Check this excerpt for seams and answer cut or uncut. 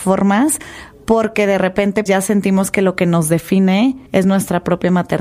cut